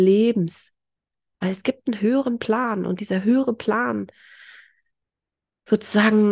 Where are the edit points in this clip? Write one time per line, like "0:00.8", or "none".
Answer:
none